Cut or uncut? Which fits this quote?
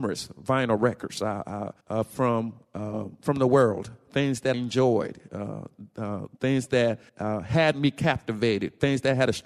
cut